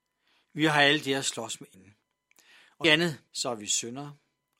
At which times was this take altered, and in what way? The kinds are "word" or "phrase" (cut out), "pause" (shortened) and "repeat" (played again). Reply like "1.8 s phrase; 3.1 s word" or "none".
1.7 s word; 2.8 s word; 3.3 s pause